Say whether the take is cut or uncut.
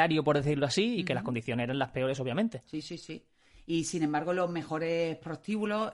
uncut